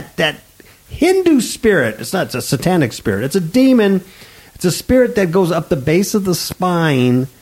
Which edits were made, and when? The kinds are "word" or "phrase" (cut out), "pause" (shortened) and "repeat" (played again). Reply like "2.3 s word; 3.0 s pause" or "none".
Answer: none